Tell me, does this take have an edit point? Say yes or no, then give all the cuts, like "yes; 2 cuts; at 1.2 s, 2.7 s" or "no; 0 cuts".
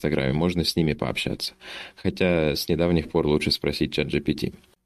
no; 0 cuts